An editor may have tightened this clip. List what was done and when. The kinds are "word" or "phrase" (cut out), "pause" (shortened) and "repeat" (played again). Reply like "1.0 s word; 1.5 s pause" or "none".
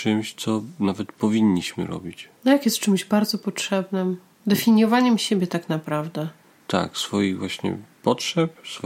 2.4 s pause